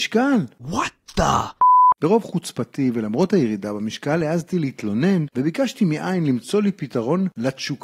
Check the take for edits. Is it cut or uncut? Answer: uncut